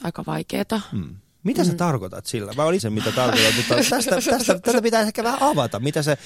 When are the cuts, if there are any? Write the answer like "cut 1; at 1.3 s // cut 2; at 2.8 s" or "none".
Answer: cut 1; at 2.8 s // cut 2; at 3.9 s